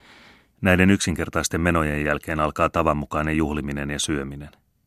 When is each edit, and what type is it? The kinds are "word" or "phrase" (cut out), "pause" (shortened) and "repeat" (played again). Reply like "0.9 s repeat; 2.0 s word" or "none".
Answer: none